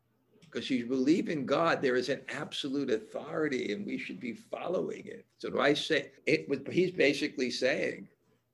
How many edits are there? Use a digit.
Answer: 2